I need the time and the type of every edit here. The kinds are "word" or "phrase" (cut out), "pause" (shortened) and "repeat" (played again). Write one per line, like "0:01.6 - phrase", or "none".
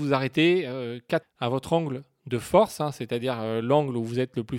0:01.2 - word